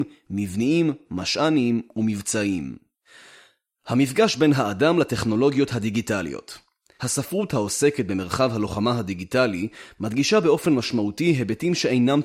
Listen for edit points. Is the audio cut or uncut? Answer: uncut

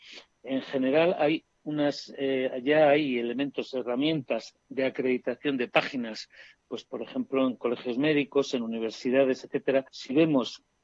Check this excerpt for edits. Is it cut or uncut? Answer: cut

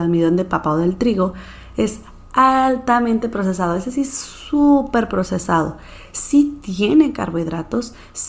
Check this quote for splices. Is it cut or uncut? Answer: uncut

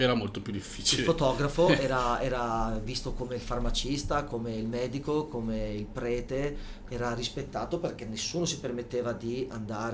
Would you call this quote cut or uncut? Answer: uncut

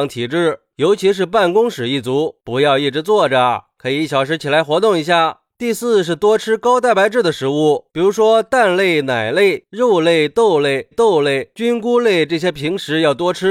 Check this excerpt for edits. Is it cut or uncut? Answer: cut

